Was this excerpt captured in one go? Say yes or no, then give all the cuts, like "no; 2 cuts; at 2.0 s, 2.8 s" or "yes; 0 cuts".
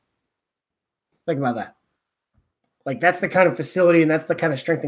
yes; 0 cuts